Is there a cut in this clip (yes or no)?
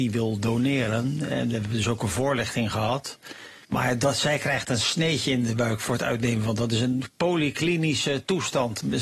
yes